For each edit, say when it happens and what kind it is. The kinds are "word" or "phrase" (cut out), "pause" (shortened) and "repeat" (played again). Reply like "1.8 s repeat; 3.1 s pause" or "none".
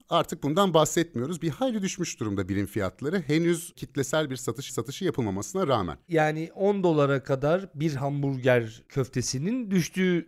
4.7 s repeat